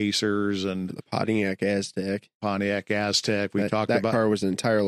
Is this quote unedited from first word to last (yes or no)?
yes